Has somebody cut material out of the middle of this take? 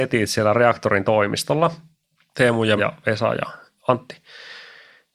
yes; 1 cut; at 2.8 s

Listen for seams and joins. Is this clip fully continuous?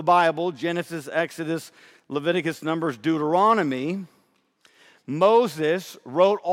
yes; 0 cuts

